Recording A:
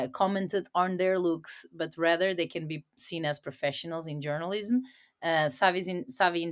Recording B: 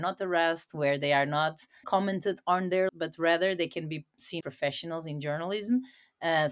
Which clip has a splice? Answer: B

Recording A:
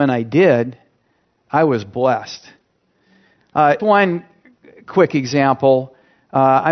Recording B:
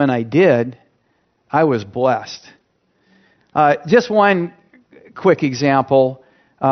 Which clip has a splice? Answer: A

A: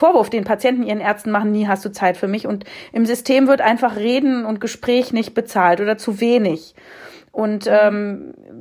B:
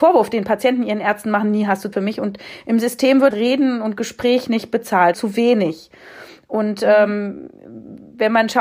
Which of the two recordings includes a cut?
B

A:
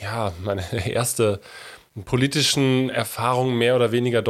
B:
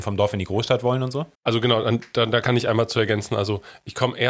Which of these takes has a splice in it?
B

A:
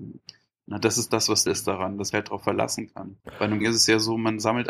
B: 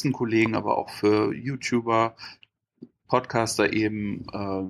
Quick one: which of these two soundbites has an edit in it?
A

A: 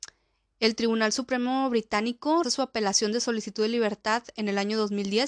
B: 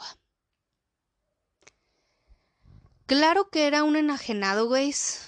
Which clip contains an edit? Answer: A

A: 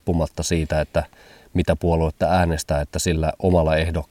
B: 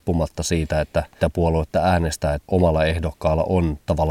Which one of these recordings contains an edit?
B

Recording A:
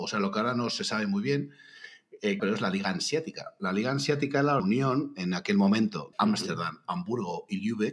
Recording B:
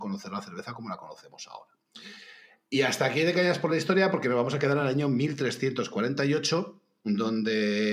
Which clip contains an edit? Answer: A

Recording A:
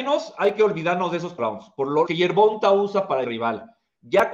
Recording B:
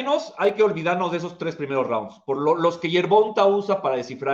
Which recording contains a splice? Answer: A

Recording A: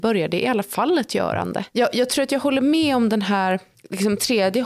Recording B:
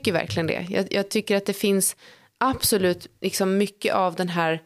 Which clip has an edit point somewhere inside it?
A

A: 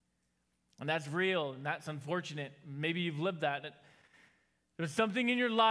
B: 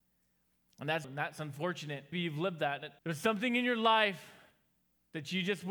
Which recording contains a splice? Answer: B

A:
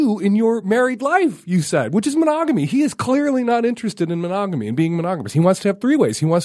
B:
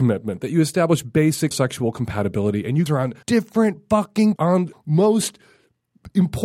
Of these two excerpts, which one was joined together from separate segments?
B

